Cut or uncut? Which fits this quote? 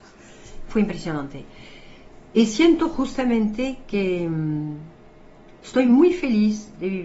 cut